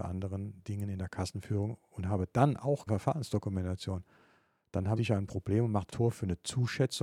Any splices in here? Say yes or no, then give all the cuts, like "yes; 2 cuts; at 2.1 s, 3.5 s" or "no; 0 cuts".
yes; 3 cuts; at 2.9 s, 5.0 s, 5.9 s